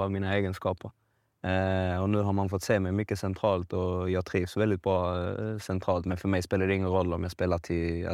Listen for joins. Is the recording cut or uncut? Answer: uncut